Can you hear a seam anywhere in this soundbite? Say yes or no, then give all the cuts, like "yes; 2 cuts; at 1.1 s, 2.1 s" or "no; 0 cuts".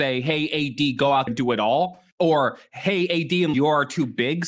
yes; 3 cuts; at 1.3 s, 2.1 s, 3.5 s